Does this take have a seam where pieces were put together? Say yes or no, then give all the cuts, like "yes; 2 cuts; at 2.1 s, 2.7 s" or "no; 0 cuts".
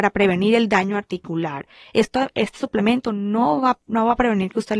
no; 0 cuts